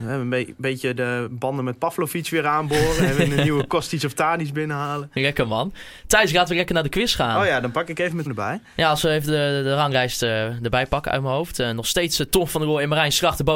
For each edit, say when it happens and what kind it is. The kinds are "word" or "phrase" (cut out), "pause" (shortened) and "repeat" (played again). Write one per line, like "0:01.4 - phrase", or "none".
0:08.3 - word